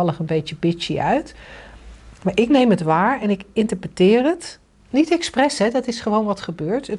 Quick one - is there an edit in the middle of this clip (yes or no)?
no